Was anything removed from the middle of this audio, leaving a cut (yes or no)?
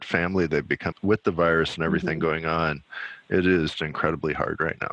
yes